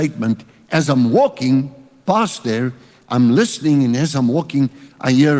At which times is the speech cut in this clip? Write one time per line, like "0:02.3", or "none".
none